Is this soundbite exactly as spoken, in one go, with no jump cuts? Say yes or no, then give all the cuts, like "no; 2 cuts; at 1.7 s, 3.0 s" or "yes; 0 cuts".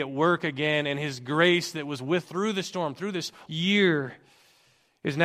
no; 2 cuts; at 2.2 s, 3.5 s